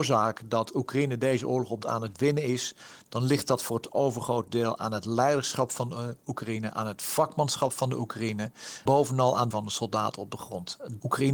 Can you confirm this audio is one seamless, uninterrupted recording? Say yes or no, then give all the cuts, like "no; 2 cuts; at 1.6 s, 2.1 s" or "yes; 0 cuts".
no; 3 cuts; at 1.8 s, 8.9 s, 9.5 s